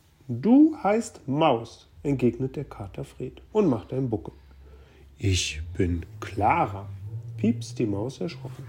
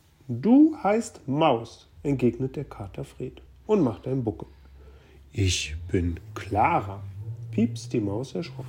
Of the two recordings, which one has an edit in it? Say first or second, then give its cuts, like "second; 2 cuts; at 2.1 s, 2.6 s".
first; 1 cut; at 3.5 s